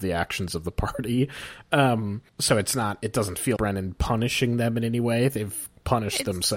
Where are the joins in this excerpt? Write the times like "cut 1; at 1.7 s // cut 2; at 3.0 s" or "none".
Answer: cut 1; at 2.3 s // cut 2; at 3.6 s